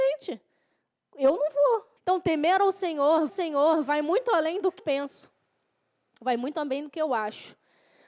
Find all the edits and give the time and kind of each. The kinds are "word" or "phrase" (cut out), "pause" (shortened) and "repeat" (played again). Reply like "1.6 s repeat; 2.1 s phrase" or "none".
2.0 s pause; 3.3 s repeat; 4.8 s word